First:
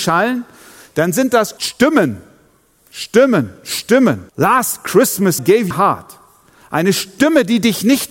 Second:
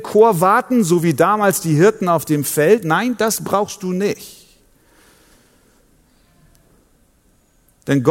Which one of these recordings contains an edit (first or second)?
first